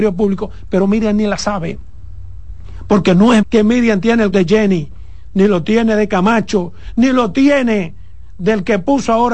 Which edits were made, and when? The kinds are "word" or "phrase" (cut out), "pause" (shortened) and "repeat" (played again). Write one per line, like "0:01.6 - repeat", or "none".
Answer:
0:03.4 - word
0:04.3 - word